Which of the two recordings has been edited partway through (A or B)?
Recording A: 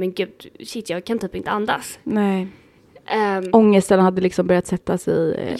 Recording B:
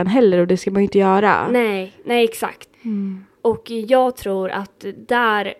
B